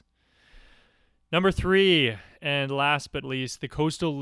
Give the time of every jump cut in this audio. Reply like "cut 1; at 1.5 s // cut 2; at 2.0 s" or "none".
cut 1; at 3.2 s